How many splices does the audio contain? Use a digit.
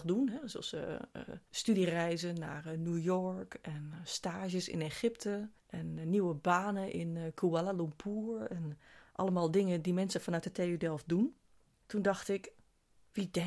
1